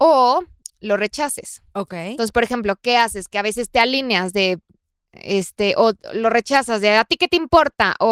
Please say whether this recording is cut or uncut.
uncut